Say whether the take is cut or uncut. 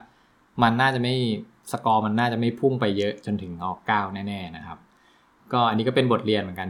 uncut